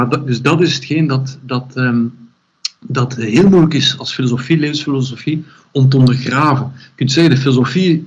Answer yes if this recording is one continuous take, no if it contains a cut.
yes